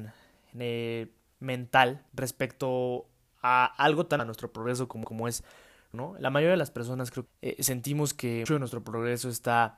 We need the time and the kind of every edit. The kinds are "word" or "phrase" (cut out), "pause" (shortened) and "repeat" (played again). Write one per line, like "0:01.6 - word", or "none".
0:02.1 - pause
0:04.2 - word
0:05.0 - repeat
0:05.9 - word
0:07.3 - word
0:08.5 - word